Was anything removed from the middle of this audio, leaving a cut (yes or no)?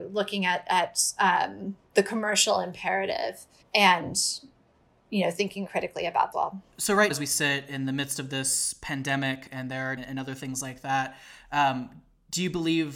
yes